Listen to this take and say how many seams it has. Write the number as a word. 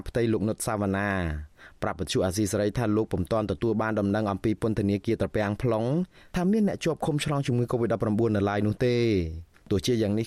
zero